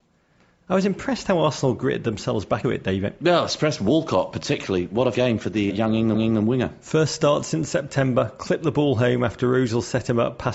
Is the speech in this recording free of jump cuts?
no; 4 cuts; at 2.6 s, 5.1 s, 5.7 s, 6.1 s

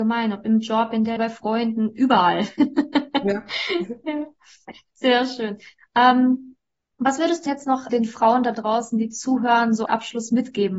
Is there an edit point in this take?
yes; 4 cuts; at 1.2 s, 7.5 s, 7.9 s, 9.9 s

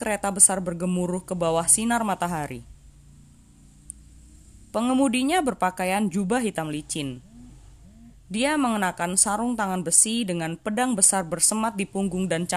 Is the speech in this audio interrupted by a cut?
no; 0 cuts

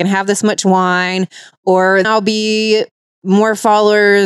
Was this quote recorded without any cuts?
no; 2 cuts; at 2.0 s, 3.1 s

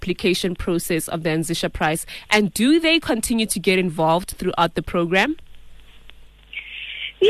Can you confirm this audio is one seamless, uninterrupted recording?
yes; 0 cuts

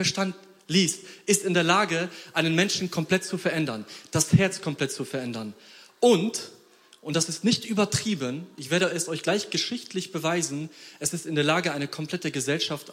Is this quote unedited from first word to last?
yes; 0 cuts

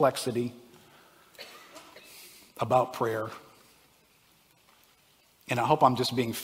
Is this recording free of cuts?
yes; 0 cuts

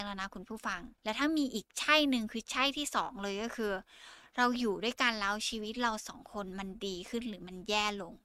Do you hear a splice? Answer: yes; 1 cut; at 0.9 s

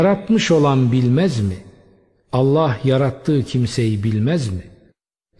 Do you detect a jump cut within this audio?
no; 0 cuts

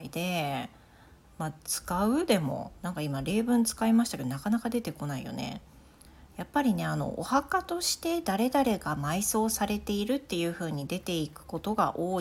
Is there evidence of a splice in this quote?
no; 0 cuts

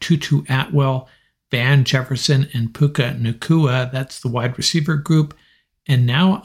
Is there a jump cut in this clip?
no; 0 cuts

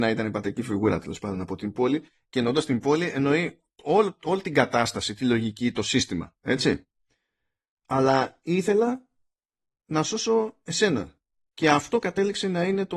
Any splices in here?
no; 0 cuts

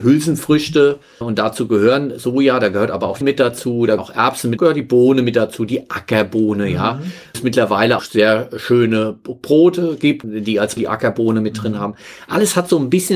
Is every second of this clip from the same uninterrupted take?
no; 8 cuts; at 1.2 s, 3.2 s, 4.0 s, 4.6 s, 7.3 s, 8.0 s, 10.2 s, 10.8 s

